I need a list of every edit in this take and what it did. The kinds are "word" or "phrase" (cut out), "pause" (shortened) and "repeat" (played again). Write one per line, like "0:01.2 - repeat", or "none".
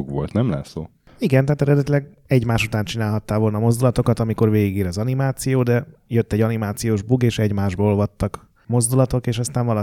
none